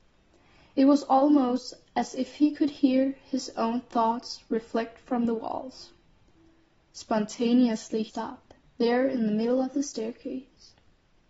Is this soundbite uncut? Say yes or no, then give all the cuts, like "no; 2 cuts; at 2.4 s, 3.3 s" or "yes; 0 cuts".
no; 1 cut; at 8.1 s